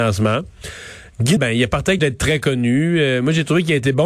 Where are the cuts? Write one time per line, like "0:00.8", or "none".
0:01.4
0:02.0